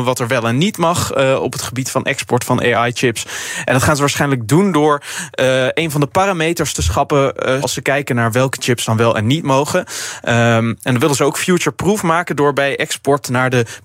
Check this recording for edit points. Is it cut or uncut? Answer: cut